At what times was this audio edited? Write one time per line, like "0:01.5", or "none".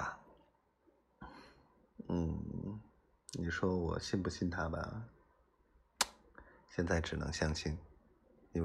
none